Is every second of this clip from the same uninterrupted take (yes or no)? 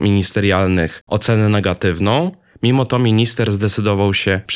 yes